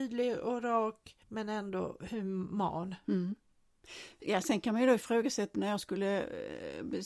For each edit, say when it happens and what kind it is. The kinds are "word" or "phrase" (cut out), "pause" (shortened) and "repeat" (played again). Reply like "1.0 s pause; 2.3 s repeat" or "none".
1.2 s pause; 5.5 s word